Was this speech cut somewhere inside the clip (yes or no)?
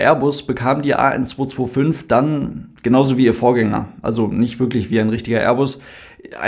no